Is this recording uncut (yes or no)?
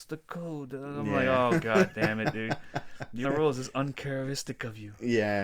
no